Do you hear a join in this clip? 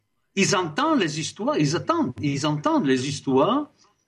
no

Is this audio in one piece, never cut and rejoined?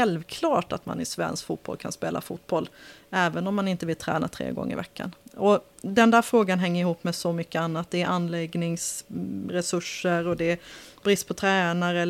yes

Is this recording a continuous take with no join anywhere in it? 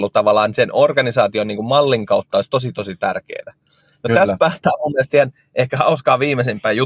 yes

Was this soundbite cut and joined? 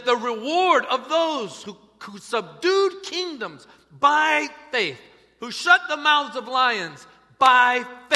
no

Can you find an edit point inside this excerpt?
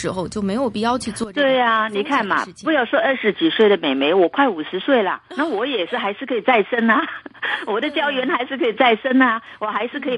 yes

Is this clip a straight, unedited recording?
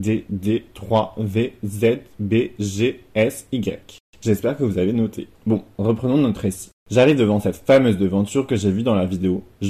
no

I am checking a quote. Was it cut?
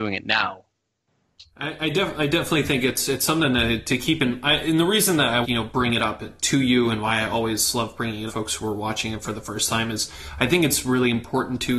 yes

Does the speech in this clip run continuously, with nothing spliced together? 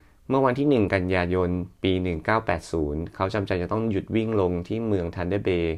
no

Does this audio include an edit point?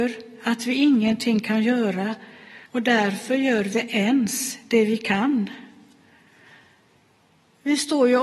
yes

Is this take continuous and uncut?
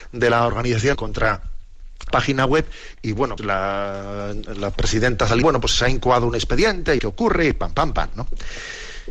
no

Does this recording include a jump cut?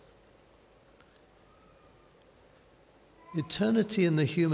no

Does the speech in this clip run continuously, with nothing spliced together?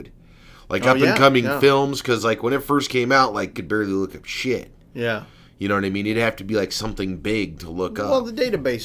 no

